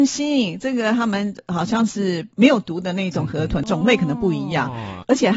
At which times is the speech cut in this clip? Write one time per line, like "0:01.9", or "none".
0:02.3